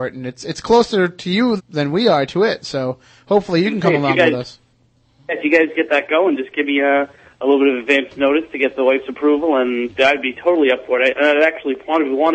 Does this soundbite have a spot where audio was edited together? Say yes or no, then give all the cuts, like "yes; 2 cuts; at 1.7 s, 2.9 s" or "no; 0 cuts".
yes; 1 cut; at 1.6 s